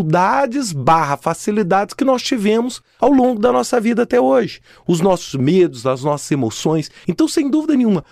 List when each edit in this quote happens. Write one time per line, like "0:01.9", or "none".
none